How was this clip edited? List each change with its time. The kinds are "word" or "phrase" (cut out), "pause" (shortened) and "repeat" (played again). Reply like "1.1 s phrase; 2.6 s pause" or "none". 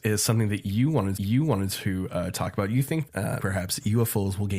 1.2 s repeat; 3.1 s word; 3.4 s word